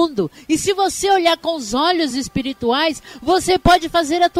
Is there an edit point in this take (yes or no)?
no